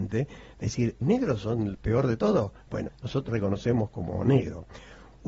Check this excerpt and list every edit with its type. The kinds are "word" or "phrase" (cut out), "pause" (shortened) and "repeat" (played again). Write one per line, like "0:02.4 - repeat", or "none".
0:01.0 - word
0:01.7 - word
0:02.9 - word
0:03.3 - word